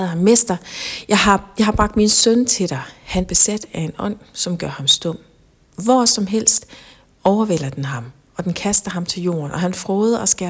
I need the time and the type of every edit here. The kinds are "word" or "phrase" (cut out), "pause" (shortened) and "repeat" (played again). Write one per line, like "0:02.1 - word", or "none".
0:03.2 - word